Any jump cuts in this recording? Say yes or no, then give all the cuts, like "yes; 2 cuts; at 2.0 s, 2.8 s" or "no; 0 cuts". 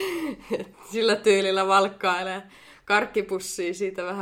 no; 0 cuts